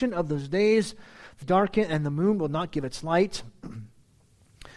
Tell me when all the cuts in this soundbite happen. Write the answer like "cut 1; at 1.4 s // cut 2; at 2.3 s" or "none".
cut 1; at 1.4 s